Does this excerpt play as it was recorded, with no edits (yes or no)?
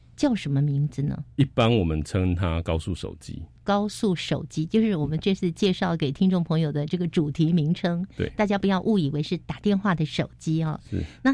no